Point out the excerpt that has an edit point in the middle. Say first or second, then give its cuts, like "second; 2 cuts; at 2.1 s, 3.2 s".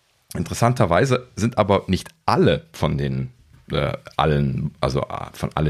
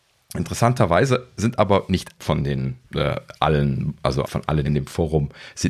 second; 4 cuts; at 2.2 s, 2.8 s, 4.2 s, 4.6 s